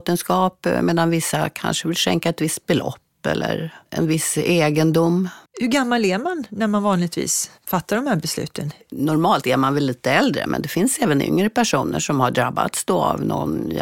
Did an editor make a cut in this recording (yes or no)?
yes